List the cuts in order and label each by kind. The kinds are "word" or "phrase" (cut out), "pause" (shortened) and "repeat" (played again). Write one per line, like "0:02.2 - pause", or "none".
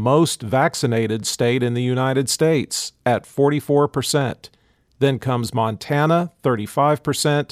none